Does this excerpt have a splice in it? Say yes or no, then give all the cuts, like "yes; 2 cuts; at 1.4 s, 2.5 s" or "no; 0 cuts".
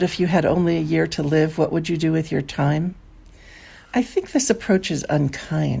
no; 0 cuts